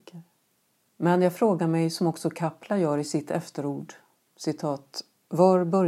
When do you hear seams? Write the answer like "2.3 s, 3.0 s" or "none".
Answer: none